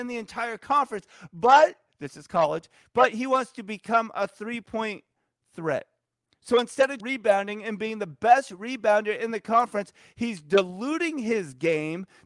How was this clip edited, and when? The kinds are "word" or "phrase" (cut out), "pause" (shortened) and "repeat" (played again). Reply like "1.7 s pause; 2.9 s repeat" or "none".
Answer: 7.0 s word